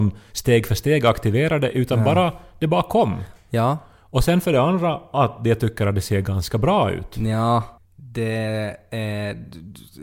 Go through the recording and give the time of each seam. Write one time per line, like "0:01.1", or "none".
0:07.8